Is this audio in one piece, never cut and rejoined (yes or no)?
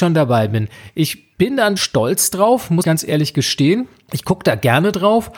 no